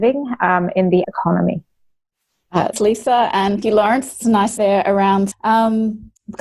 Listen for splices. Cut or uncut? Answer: cut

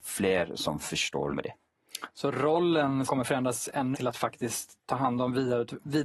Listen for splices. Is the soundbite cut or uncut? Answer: cut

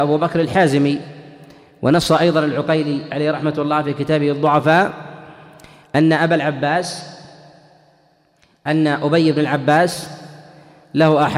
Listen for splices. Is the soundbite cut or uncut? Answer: uncut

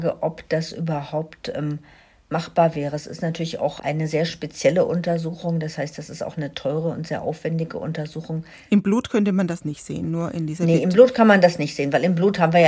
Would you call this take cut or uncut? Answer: uncut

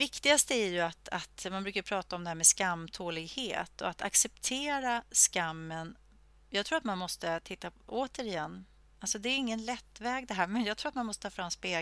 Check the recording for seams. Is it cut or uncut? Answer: uncut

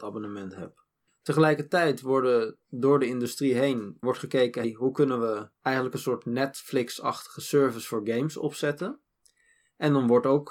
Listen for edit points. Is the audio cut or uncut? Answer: cut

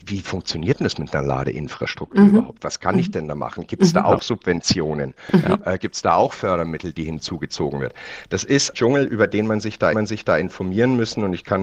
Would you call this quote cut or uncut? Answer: cut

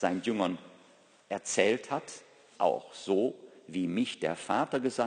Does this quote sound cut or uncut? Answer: cut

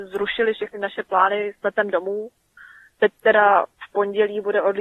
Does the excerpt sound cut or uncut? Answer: uncut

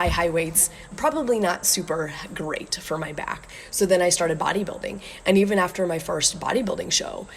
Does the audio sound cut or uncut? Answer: cut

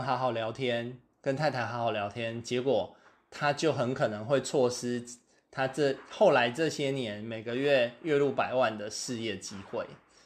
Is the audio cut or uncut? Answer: uncut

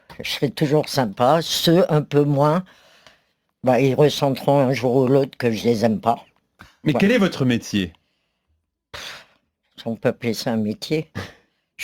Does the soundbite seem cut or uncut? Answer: uncut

